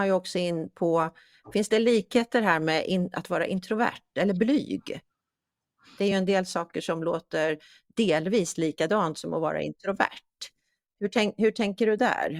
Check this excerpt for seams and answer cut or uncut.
uncut